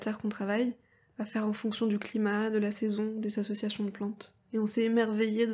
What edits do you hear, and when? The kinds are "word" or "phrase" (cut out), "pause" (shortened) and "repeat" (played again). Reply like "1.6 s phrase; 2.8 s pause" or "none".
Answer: 4.4 s pause